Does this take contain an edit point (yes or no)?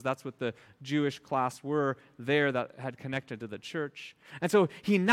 no